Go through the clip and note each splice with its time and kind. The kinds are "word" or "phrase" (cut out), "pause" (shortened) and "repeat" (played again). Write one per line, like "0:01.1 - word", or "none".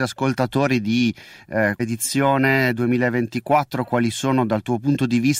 0:01.8 - word